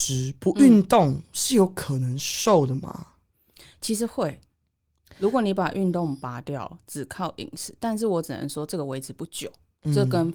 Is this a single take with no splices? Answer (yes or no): yes